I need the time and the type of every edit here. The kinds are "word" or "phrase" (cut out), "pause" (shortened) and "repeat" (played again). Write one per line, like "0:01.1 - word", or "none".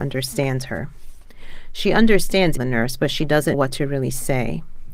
0:02.6 - phrase
0:03.5 - word